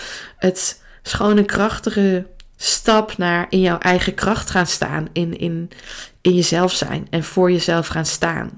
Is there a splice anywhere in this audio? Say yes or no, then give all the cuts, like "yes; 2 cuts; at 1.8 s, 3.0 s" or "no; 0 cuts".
no; 0 cuts